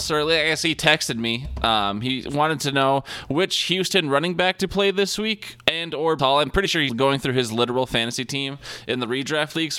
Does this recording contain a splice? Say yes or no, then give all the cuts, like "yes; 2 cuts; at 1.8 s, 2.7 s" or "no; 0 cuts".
yes; 2 cuts; at 6.2 s, 6.9 s